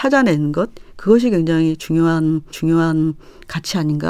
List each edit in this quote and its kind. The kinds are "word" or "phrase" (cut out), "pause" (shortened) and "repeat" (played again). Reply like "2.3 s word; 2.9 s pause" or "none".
2.5 s repeat